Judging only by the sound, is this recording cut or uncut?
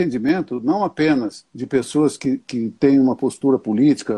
cut